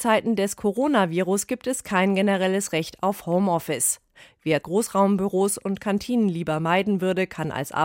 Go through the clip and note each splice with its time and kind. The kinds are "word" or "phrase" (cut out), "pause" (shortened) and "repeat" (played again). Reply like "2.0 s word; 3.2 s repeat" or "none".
4.6 s word